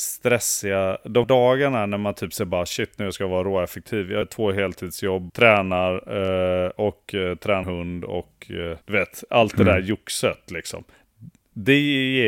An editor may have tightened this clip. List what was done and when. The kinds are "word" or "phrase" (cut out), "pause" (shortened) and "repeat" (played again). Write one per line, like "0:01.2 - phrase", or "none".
0:01.2 - word
0:04.2 - word
0:05.3 - word
0:07.6 - word
0:08.8 - pause